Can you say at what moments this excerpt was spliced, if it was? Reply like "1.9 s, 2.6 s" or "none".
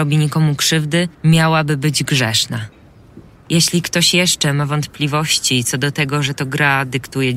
1.1 s, 3.4 s